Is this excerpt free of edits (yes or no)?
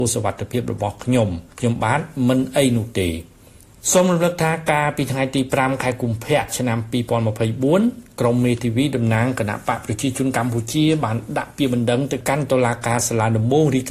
no